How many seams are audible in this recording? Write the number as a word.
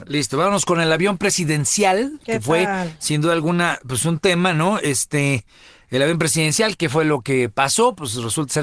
zero